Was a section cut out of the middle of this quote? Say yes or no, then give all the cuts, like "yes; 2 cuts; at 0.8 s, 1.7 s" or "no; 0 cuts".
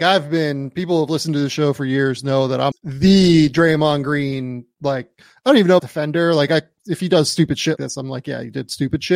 yes; 3 cuts; at 2.7 s, 5.8 s, 7.8 s